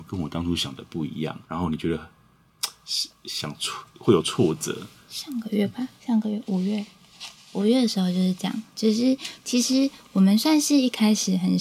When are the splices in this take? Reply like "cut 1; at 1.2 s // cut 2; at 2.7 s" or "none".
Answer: cut 1; at 1.4 s // cut 2; at 6.0 s